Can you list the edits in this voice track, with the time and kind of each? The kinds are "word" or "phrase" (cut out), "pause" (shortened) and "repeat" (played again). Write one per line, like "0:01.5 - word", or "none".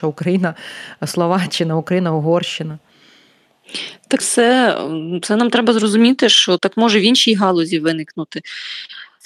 0:04.2 - phrase
0:06.6 - word